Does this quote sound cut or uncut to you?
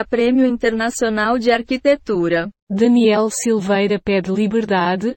cut